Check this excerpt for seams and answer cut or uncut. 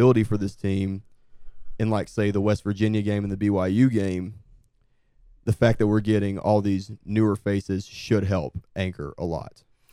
uncut